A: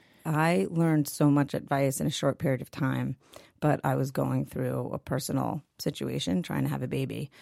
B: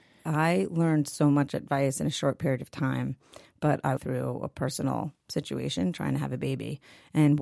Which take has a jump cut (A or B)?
B